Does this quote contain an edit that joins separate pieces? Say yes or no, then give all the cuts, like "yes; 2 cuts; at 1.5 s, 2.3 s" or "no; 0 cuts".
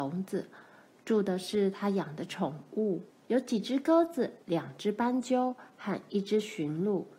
yes; 2 cuts; at 3.1 s, 4.4 s